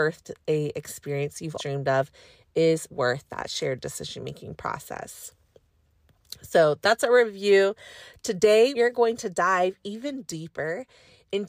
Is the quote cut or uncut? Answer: cut